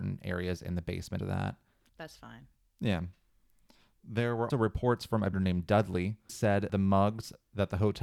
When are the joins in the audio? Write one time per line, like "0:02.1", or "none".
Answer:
0:01.2
0:01.9
0:04.5
0:05.3
0:06.3
0:06.7